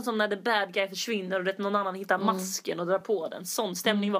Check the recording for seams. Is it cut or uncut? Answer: uncut